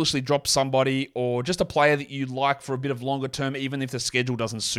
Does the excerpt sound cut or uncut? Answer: uncut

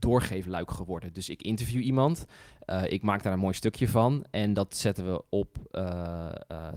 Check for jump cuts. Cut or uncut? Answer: uncut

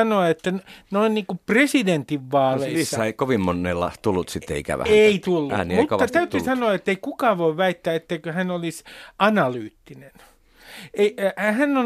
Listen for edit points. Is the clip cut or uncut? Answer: uncut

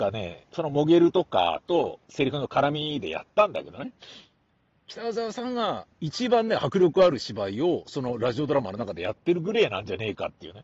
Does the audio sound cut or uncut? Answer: cut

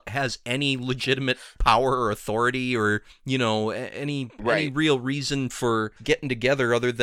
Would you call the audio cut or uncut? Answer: cut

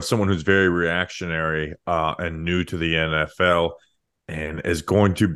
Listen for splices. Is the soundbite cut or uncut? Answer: uncut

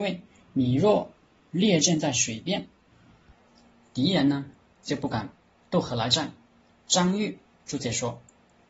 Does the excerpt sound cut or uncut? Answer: uncut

